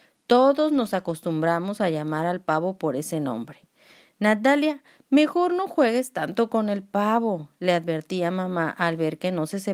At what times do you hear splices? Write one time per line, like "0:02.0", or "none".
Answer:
none

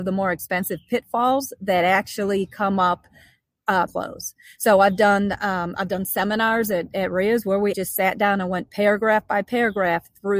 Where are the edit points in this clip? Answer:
0:03.9
0:07.7

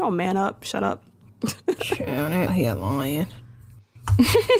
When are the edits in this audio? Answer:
0:02.5

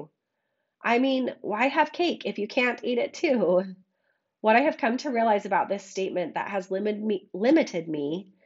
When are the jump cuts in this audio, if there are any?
none

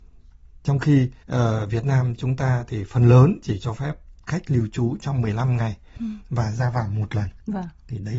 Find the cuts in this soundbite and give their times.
0:01.2

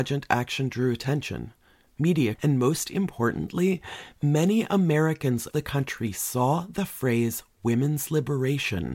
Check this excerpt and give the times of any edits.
0:02.3
0:05.5

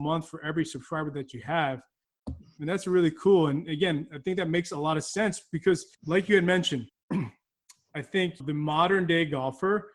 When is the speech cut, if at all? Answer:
0:05.9
0:06.9
0:08.4

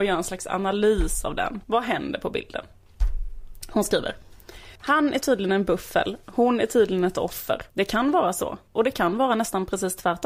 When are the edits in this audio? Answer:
0:01.6
0:04.8
0:07.7
0:08.7

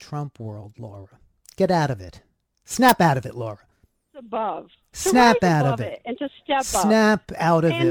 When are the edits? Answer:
none

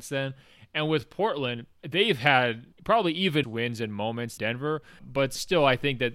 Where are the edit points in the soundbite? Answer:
0:01.8
0:02.7
0:03.4
0:04.4
0:05.0

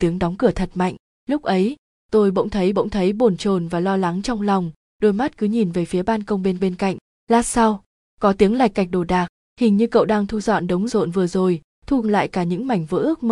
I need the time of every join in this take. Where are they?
0:02.7
0:06.6
0:10.9
0:12.0

